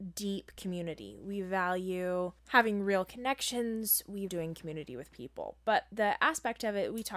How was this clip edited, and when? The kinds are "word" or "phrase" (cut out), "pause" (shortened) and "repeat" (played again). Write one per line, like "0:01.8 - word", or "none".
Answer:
0:02.4 - pause
0:04.3 - word